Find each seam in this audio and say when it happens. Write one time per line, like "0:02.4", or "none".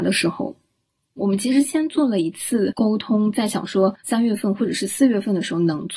0:04.0